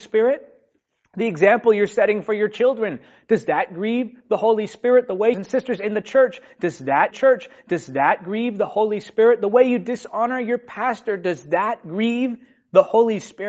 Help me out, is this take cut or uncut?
cut